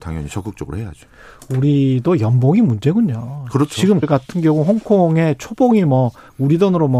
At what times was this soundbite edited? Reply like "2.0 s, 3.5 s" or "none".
4.0 s